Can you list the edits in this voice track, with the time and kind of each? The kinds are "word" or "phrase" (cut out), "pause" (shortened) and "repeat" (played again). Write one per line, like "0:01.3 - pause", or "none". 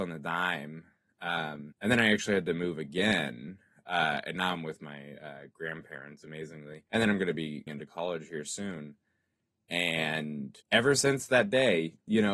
0:01.7 - word
0:06.9 - pause
0:07.7 - word
0:10.6 - pause